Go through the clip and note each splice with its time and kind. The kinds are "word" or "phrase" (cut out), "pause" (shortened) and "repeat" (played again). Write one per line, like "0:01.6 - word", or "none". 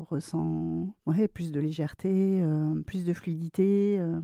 0:01.0 - pause